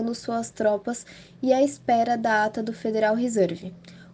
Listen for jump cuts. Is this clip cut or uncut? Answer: uncut